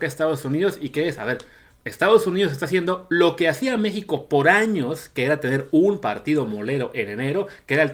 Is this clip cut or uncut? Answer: uncut